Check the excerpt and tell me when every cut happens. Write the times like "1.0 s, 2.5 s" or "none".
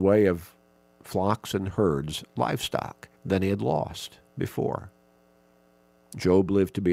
3.2 s